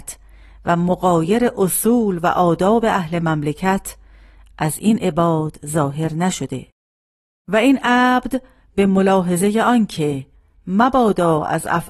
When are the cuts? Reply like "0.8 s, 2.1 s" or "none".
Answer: none